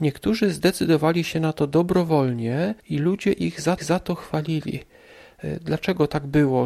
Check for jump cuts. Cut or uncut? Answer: cut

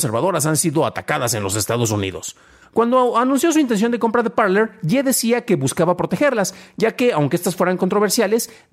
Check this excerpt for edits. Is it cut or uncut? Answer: uncut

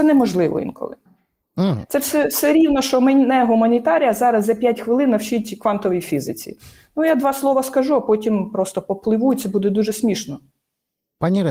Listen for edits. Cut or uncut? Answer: uncut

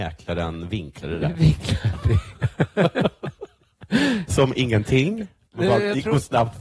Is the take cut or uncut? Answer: uncut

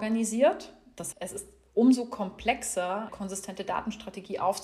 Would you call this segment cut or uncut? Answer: cut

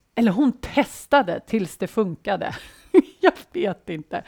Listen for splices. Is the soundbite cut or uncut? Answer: uncut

